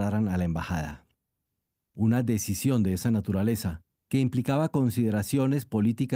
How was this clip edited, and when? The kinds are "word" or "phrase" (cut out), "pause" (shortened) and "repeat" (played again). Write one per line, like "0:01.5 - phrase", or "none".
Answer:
none

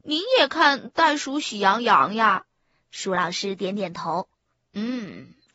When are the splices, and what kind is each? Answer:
0:02.5 - pause

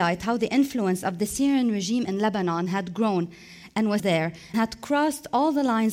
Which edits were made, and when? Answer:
0:04.0 - word
0:04.5 - word

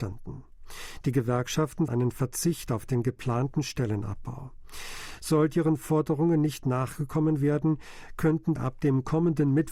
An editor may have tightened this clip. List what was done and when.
0:01.9 - word
0:08.6 - word

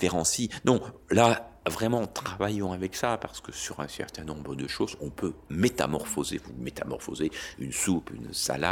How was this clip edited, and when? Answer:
0:01.0 - pause

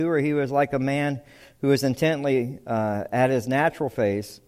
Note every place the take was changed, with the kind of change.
none

